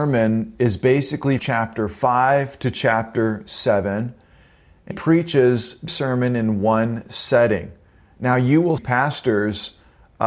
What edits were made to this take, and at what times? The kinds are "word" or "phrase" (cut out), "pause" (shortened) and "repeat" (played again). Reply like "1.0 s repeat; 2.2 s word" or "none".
1.4 s word; 4.9 s word; 5.9 s word; 8.8 s word